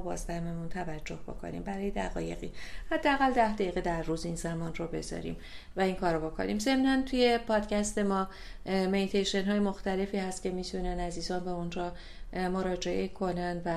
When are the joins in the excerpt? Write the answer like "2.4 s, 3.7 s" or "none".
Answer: none